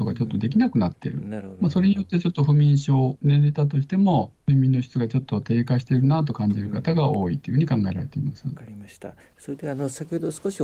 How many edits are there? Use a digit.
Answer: 0